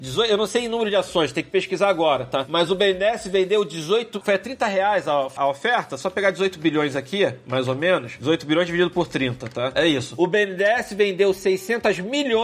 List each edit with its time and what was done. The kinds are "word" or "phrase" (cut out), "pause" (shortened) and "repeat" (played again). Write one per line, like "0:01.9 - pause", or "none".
0:04.2 - word
0:05.4 - word